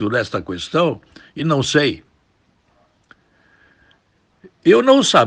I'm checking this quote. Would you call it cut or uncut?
uncut